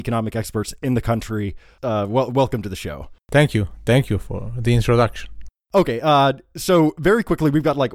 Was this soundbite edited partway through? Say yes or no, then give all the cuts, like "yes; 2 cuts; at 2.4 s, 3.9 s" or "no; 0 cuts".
no; 0 cuts